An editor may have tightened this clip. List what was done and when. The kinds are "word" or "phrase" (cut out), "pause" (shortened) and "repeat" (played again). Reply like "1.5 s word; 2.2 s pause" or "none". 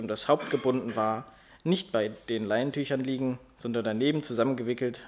none